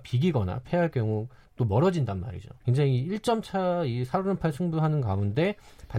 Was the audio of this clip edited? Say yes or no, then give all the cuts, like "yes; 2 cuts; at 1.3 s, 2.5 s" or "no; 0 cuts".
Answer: yes; 1 cut; at 2.6 s